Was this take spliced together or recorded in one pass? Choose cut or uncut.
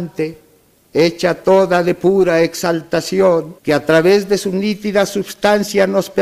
cut